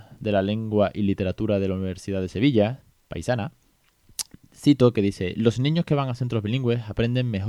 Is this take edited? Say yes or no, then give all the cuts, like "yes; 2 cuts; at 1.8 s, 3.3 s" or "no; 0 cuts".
no; 0 cuts